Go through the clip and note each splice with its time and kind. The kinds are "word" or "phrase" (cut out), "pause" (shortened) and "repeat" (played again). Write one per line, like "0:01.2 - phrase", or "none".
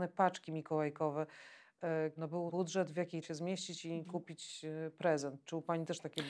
0:02.2 - word
0:02.5 - word
0:03.2 - phrase